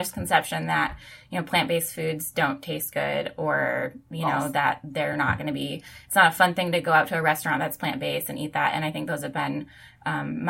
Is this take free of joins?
yes; 0 cuts

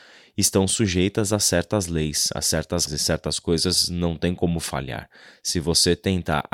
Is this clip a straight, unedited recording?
no; 1 cut; at 2.9 s

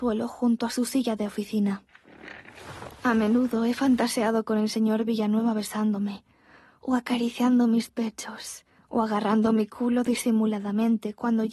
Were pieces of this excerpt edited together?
no; 0 cuts

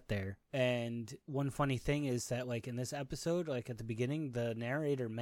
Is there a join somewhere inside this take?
no; 0 cuts

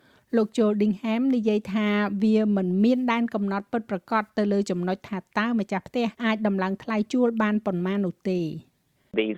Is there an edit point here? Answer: yes; 1 cut; at 6.1 s

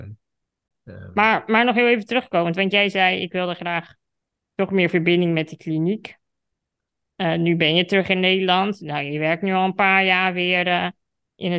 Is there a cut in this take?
no; 0 cuts

